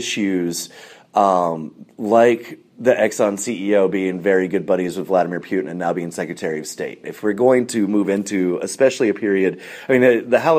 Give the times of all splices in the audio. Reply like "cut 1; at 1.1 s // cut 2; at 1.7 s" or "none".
none